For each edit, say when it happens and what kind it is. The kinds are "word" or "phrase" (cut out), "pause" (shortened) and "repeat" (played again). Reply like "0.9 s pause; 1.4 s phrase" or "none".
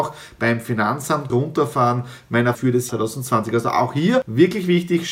1.3 s word; 2.5 s word; 2.9 s word

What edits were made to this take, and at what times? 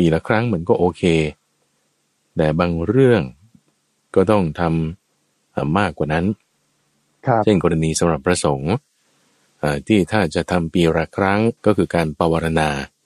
11.6 s pause

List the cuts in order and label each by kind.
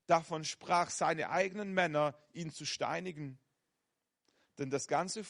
none

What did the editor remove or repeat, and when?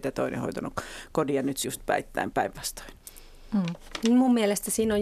1.6 s word; 2.3 s word

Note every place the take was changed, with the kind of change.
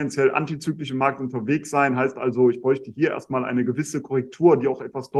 none

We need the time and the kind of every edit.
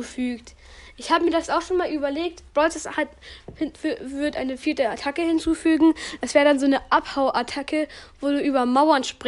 3.7 s pause

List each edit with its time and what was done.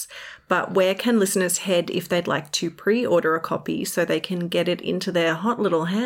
none

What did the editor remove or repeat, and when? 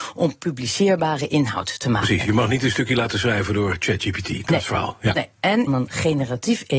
5.7 s phrase

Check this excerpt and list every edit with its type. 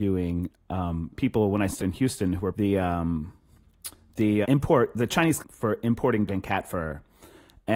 1.1 s word; 1.8 s word; 2.5 s word; 4.4 s word; 5.4 s word; 6.3 s word

